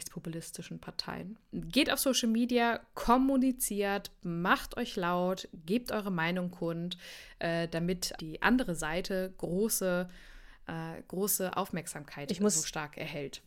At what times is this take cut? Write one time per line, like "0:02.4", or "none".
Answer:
0:08.2